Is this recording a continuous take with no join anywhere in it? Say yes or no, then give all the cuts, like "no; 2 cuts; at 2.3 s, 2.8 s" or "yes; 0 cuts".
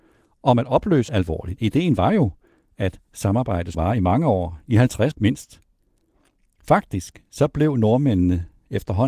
no; 3 cuts; at 1.1 s, 3.7 s, 5.1 s